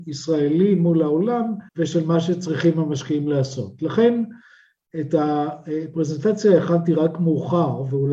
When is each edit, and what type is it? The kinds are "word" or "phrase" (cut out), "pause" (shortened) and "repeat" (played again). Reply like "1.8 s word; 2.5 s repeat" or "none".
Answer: 1.7 s pause